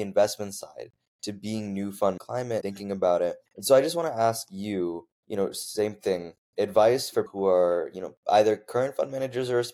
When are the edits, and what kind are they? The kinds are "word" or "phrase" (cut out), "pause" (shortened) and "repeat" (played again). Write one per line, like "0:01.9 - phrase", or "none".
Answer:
0:02.2 - phrase
0:02.6 - word
0:03.5 - pause
0:05.1 - pause
0:07.3 - word
0:08.2 - pause